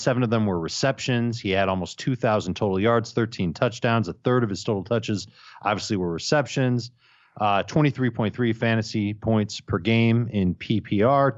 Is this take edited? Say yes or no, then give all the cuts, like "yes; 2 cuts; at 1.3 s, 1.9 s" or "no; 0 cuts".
no; 0 cuts